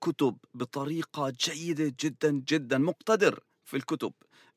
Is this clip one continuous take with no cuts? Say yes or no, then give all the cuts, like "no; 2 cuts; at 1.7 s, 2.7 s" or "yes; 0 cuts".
yes; 0 cuts